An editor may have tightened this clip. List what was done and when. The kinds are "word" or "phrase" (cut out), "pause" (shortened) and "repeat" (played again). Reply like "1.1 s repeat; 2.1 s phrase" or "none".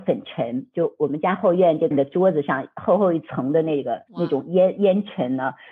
1.9 s word; 4.1 s pause